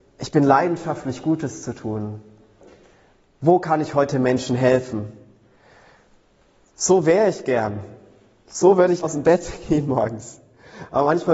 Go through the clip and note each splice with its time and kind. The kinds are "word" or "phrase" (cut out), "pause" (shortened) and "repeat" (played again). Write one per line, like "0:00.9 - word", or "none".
0:09.0 - word